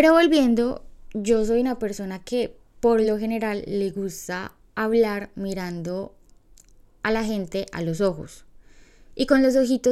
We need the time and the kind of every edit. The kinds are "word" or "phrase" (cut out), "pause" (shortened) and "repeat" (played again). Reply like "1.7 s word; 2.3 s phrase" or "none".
none